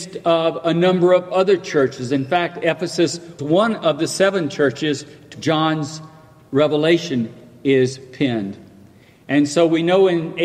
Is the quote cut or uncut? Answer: cut